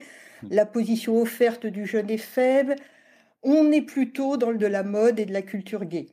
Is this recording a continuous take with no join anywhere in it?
no; 1 cut; at 4.6 s

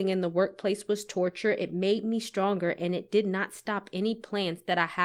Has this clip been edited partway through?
no; 0 cuts

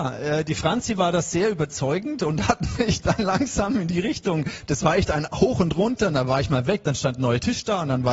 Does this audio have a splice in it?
no; 0 cuts

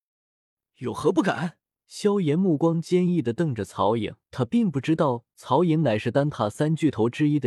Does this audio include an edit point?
yes; 2 cuts; at 1.8 s, 4.2 s

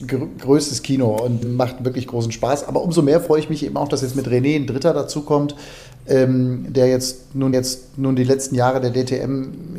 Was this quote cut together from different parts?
yes; 2 cuts; at 1.4 s, 7.5 s

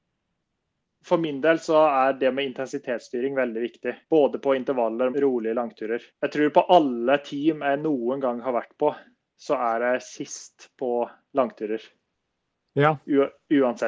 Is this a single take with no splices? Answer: no; 3 cuts; at 4.0 s, 5.1 s, 6.1 s

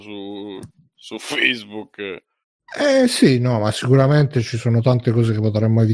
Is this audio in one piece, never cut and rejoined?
yes; 0 cuts

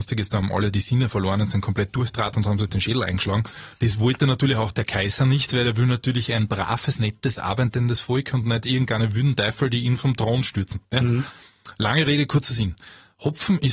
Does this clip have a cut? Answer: yes; 1 cut; at 3.7 s

